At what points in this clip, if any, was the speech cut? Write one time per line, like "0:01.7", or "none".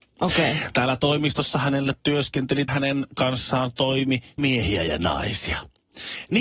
0:02.7
0:04.4